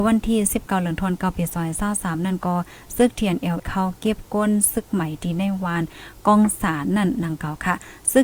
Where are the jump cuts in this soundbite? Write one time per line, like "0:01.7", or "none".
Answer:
0:03.6